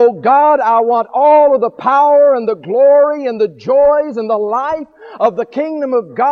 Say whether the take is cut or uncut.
uncut